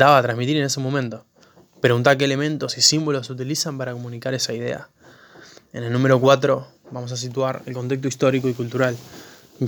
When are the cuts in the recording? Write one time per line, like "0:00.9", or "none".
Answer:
none